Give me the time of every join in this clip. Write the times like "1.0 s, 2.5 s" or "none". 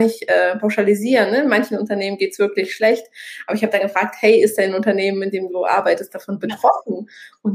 none